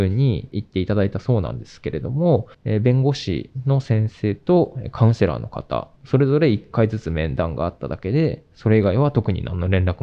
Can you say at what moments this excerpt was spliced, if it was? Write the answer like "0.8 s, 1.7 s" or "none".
2.5 s, 6.0 s